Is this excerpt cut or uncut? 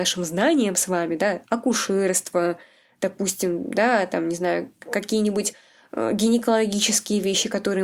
uncut